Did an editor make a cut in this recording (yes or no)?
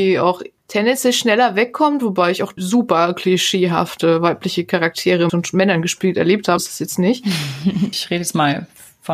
yes